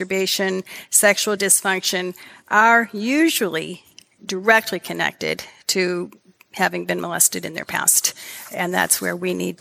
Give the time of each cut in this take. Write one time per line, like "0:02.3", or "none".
none